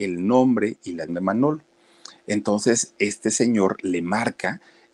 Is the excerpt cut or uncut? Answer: cut